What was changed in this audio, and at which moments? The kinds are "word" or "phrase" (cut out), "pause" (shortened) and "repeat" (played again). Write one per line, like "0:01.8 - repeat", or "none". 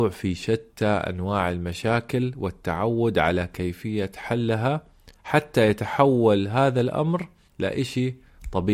0:05.2 - pause
0:07.5 - pause